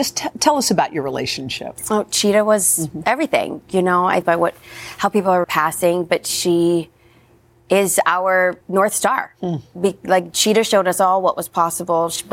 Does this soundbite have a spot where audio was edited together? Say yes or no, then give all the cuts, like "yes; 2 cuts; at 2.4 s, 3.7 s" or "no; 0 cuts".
yes; 3 cuts; at 4.2 s, 5.4 s, 8.6 s